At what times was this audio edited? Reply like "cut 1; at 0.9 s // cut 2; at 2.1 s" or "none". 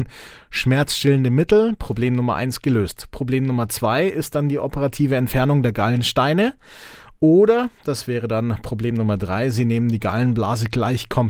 none